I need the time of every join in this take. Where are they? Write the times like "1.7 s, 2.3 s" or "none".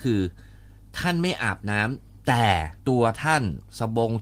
2.8 s